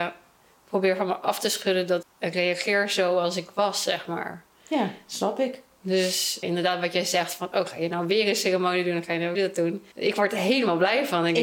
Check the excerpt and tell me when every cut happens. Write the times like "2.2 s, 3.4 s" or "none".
2.0 s, 6.4 s, 9.3 s, 9.9 s